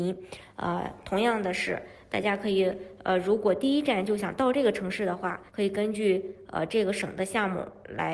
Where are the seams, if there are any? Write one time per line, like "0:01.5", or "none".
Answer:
0:05.5